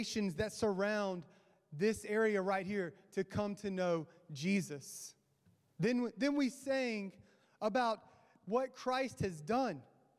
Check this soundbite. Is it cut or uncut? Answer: uncut